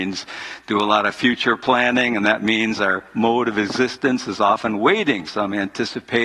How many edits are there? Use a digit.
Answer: 1